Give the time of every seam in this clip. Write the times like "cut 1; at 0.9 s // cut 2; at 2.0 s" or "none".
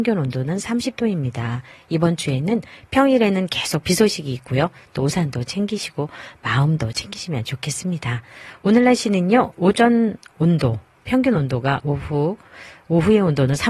none